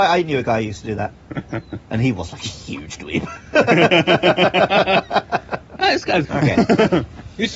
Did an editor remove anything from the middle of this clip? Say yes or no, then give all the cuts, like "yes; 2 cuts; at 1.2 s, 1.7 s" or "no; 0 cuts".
yes; 1 cut; at 6.2 s